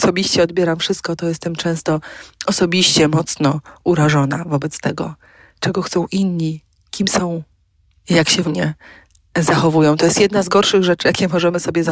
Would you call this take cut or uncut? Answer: cut